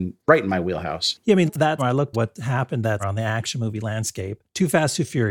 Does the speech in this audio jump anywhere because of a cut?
yes; 4 cuts; at 1.5 s, 1.8 s, 2.1 s, 3.0 s

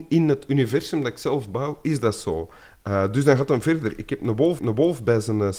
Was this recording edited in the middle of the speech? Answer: yes; 1 cut; at 4.6 s

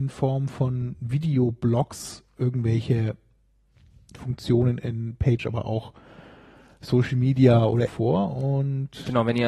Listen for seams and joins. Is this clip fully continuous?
no; 2 cuts; at 5.4 s, 7.9 s

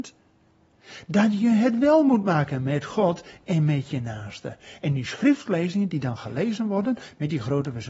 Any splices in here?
no; 0 cuts

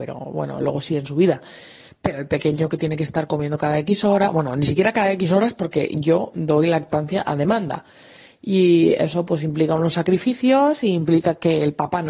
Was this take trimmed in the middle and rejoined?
no; 0 cuts

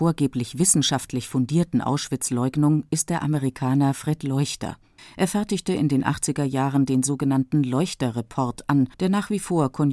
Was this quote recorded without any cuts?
no; 2 cuts; at 5.0 s, 8.9 s

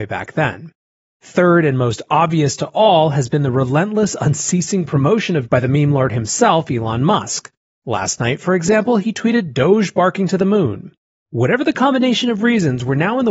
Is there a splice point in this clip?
yes; 1 cut; at 5.5 s

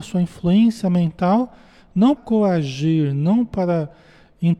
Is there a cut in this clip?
yes; 1 cut; at 2.2 s

